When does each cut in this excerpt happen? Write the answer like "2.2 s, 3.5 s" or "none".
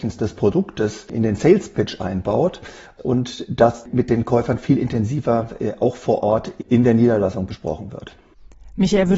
none